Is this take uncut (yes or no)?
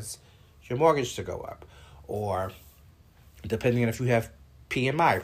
yes